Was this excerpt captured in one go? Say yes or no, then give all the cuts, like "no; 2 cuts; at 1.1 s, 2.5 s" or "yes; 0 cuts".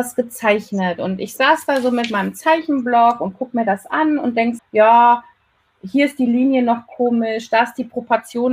no; 1 cut; at 4.6 s